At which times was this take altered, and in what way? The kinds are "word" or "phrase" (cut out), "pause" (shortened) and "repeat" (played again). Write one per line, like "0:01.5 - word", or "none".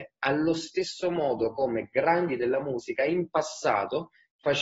none